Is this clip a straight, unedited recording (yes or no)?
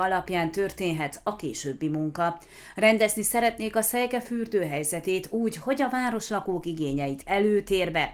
no